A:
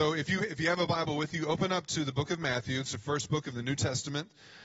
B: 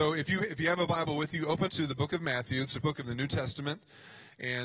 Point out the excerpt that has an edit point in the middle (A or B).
B